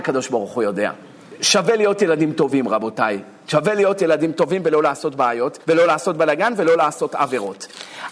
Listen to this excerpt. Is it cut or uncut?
cut